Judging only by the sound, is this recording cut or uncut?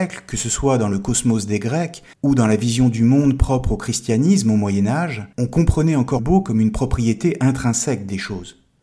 cut